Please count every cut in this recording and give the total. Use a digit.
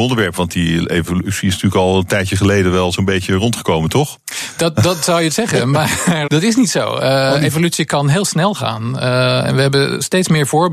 2